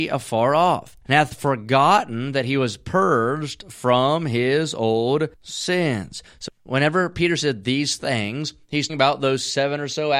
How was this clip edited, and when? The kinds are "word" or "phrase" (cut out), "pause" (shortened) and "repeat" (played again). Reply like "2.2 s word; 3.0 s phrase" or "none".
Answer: 1.0 s pause; 5.3 s pause; 6.5 s word; 8.9 s word